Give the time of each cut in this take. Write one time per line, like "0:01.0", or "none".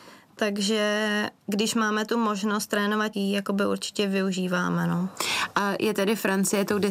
0:01.4
0:03.1